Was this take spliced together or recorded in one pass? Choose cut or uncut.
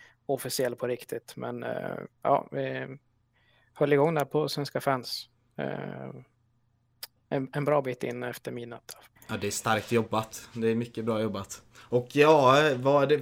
cut